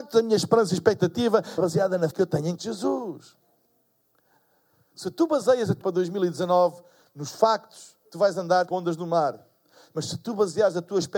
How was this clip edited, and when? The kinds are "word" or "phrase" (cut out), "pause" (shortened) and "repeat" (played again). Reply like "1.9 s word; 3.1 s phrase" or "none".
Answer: 1.6 s word; 2.1 s word; 2.6 s word; 5.8 s word; 8.7 s word

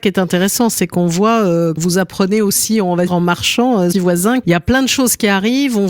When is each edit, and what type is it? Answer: 1.8 s word; 3.1 s word; 3.9 s word; 4.4 s word

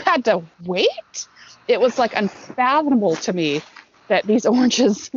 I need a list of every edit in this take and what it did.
none

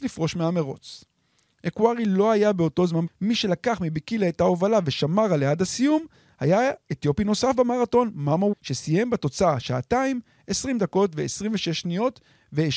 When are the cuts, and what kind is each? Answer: 3.1 s word; 8.5 s word

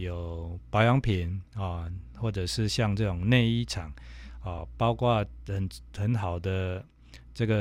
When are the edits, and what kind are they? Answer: none

